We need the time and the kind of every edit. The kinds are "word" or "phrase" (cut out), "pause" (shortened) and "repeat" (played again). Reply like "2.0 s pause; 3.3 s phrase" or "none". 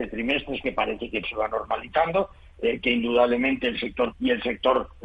1.2 s word; 4.1 s word

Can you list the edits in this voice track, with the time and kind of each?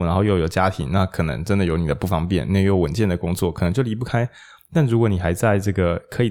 none

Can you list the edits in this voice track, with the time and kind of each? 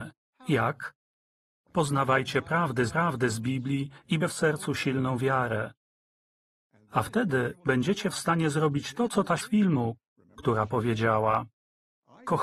2.9 s repeat; 4.2 s word; 9.4 s word

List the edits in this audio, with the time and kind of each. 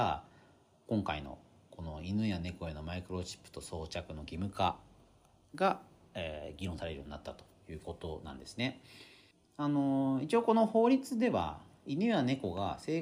9.3 s pause

